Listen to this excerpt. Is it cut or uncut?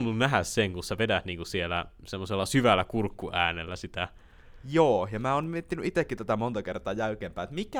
uncut